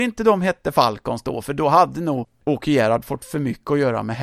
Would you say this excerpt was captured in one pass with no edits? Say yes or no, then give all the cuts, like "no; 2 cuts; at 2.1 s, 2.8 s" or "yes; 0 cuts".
yes; 0 cuts